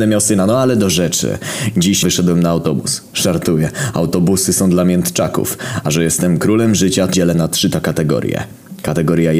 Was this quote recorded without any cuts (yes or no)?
no